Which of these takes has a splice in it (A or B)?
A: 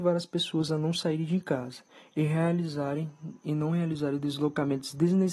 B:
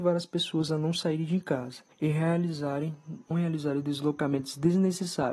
B